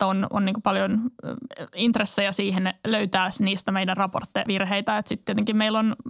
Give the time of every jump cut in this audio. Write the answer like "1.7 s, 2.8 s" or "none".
4.5 s